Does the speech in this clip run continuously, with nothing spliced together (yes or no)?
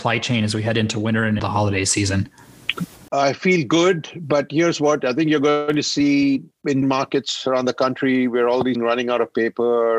no